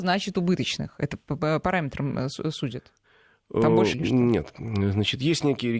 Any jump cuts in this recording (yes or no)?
yes